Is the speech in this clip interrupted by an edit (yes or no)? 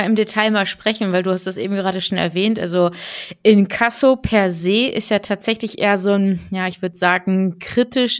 no